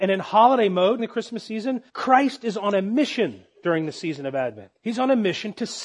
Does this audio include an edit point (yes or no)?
yes